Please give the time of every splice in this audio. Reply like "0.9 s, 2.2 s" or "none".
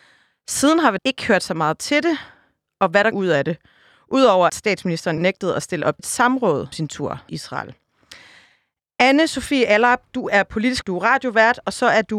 1.0 s, 3.1 s, 4.5 s, 5.2 s, 6.0 s, 6.7 s, 7.3 s, 10.8 s

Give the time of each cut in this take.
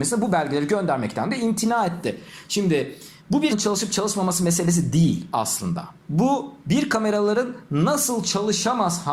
3.2 s, 3.5 s, 6.0 s

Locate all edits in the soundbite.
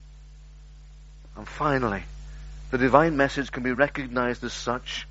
none

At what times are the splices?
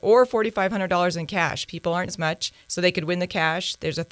1.7 s, 2.1 s, 2.6 s

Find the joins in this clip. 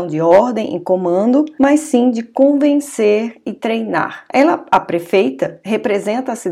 none

